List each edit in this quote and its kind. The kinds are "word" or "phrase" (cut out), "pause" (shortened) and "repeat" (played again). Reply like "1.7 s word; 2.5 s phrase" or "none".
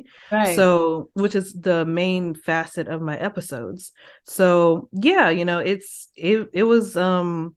none